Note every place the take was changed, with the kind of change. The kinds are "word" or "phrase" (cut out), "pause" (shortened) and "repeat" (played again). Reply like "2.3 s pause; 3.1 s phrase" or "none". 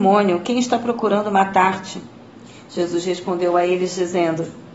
none